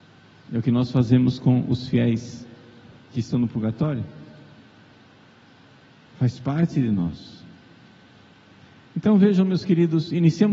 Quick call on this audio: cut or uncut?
uncut